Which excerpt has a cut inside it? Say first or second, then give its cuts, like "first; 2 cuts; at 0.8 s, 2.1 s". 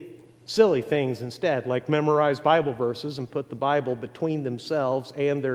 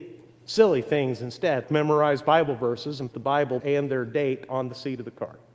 second; 3 cuts; at 1.6 s, 3.1 s, 3.6 s